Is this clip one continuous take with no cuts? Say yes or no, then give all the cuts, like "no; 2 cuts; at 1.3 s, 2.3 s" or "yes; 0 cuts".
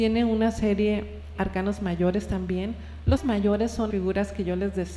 no; 3 cuts; at 1.4 s, 3.2 s, 3.9 s